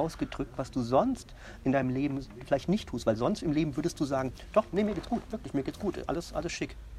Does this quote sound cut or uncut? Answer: uncut